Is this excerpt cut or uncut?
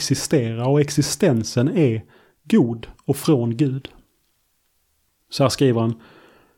uncut